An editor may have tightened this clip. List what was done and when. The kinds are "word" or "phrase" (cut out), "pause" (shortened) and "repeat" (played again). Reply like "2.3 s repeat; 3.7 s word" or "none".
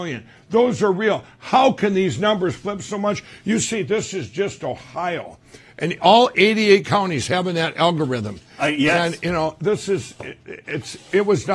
none